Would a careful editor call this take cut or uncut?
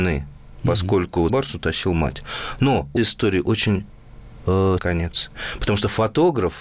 cut